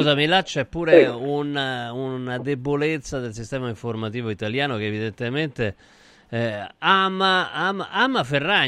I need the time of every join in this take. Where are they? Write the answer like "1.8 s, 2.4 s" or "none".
none